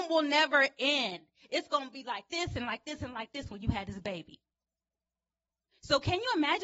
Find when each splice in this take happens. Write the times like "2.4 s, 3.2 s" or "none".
none